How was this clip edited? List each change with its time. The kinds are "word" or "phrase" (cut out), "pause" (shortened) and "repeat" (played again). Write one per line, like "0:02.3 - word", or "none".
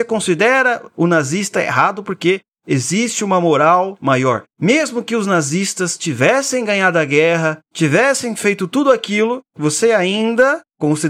0:04.5 - pause